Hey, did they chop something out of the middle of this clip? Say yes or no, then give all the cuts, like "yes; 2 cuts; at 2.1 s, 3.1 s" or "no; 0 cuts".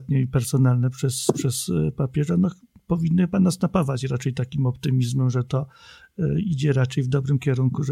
no; 0 cuts